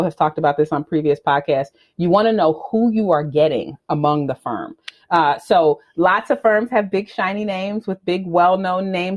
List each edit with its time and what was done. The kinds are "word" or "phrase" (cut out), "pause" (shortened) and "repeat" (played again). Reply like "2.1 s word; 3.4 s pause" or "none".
none